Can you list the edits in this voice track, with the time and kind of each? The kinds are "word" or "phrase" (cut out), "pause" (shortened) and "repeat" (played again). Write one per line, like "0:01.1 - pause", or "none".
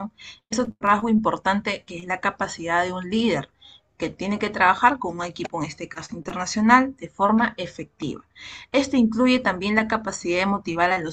none